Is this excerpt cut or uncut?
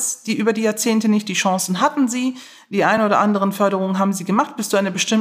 uncut